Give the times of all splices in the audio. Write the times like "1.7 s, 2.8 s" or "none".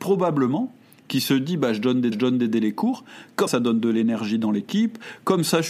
2.1 s, 3.5 s